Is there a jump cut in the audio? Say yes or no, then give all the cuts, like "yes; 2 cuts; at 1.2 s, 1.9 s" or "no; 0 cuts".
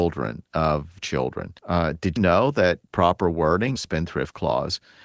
yes; 5 cuts; at 1.0 s, 1.6 s, 2.2 s, 2.9 s, 3.8 s